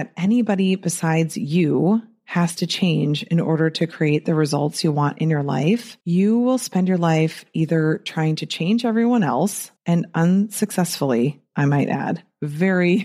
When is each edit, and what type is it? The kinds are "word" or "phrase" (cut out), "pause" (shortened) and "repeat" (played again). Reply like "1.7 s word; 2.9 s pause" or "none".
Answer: 6.0 s pause; 9.8 s pause

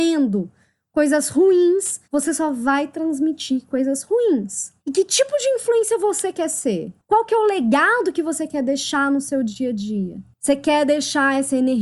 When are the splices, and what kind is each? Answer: 2.0 s pause; 4.8 s pause

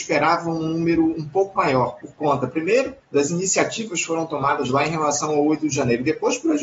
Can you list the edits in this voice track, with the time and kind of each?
3.0 s pause

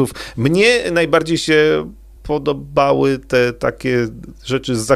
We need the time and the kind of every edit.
none

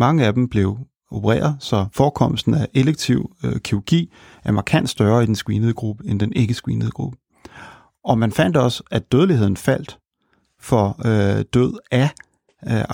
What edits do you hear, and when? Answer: none

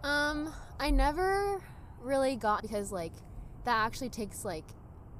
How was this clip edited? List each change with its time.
2.6 s phrase

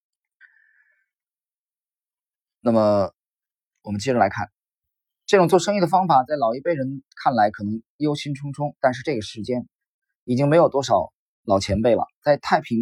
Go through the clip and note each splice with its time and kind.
11.3 s pause

